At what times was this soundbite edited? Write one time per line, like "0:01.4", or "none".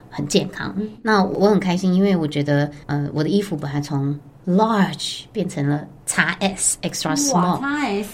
0:02.8